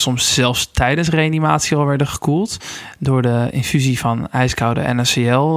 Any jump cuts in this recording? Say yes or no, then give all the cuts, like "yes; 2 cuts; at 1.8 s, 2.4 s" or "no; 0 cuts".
no; 0 cuts